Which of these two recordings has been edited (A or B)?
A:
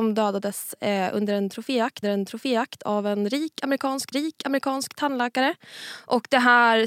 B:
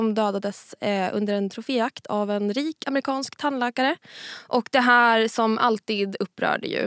A